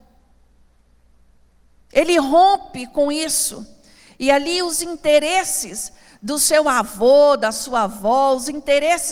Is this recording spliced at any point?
no; 0 cuts

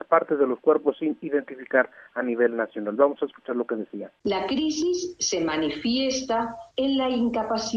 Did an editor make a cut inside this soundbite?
no; 0 cuts

